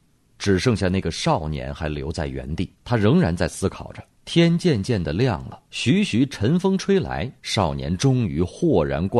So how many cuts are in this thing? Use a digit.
4